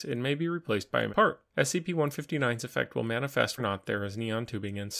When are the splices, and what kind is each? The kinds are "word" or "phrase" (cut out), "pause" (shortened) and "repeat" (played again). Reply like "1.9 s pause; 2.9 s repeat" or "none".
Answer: 1.1 s word; 1.5 s pause; 3.6 s word